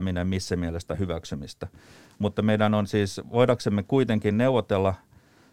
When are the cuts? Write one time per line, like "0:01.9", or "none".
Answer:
none